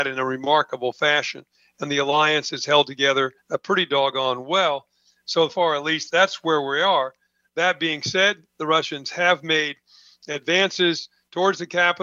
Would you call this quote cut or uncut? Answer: cut